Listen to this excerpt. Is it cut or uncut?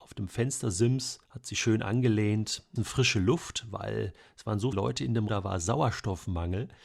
cut